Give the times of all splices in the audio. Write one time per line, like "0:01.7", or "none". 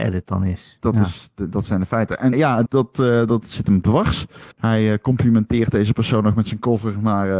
0:02.3
0:02.7
0:04.5